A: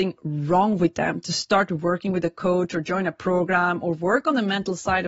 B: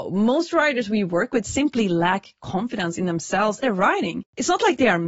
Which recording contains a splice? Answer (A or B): B